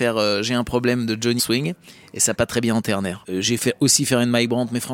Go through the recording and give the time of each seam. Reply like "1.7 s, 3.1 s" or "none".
1.4 s, 2.3 s, 3.6 s